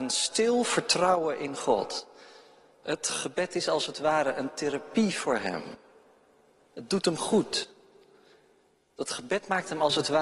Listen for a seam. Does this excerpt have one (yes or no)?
no